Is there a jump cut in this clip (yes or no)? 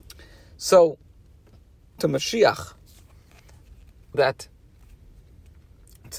yes